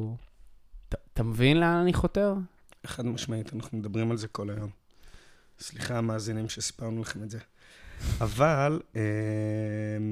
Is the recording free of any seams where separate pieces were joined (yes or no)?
yes